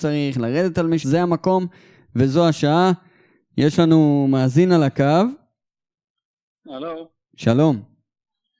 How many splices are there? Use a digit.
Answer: 1